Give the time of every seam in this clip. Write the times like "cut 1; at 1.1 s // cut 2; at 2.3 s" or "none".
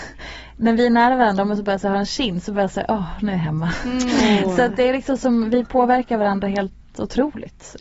none